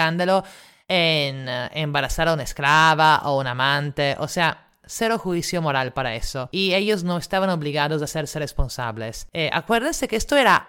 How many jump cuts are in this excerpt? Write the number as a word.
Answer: zero